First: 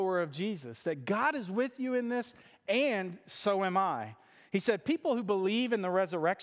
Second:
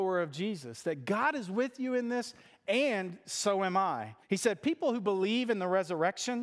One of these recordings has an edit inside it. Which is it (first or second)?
second